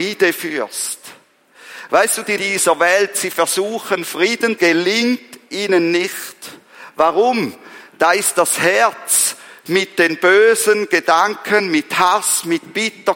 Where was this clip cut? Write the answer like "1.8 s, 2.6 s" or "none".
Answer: 2.4 s, 4.6 s